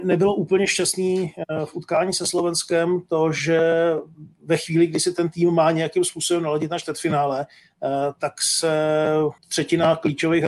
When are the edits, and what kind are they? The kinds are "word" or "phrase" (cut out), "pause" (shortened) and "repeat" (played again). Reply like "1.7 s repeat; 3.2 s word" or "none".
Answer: 9.4 s pause